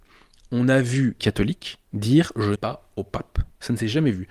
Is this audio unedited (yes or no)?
no